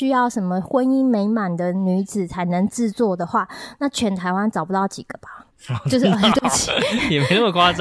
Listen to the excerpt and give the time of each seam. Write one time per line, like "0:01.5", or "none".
0:05.5

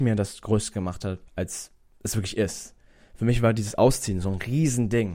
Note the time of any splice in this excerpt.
0:01.3

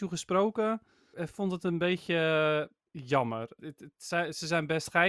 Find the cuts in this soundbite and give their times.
0:01.1
0:02.8
0:03.6

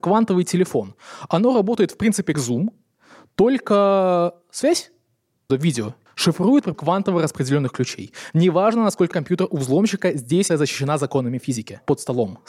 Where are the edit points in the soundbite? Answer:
0:02.3
0:05.5
0:06.1
0:06.7
0:09.1
0:10.5

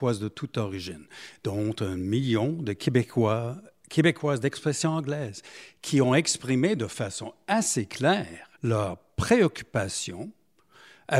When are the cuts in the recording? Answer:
0:08.6

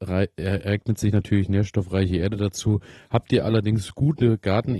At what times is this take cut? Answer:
none

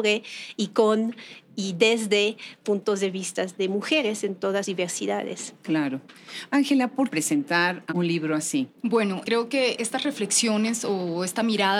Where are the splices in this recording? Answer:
0:04.6
0:07.1
0:07.9
0:08.8

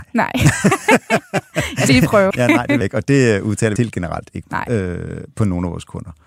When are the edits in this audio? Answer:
0:01.9
0:02.3
0:02.8
0:03.8
0:04.4

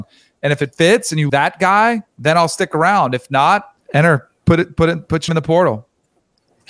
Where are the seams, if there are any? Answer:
0:01.3
0:02.1
0:03.8
0:05.3

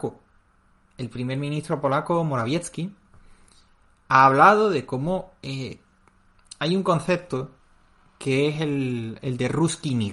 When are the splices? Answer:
none

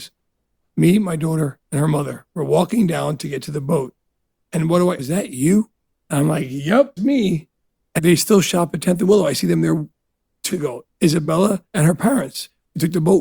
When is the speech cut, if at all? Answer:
0:01.6
0:05.0
0:05.9
0:07.0
0:08.0
0:10.5
0:11.7

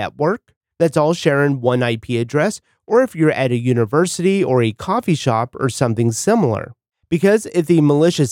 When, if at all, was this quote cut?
none

